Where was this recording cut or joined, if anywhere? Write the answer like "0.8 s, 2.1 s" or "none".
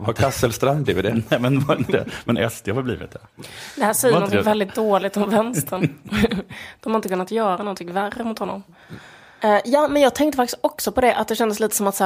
none